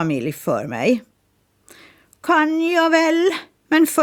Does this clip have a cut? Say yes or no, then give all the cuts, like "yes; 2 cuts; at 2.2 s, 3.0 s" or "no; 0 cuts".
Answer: no; 0 cuts